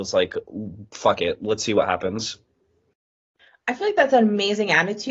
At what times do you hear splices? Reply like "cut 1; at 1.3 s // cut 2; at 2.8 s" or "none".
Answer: none